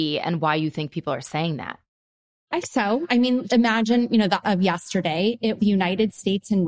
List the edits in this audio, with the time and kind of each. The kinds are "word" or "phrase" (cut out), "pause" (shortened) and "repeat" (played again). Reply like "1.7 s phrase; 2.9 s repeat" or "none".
2.6 s word; 3.5 s word; 4.4 s word; 5.6 s word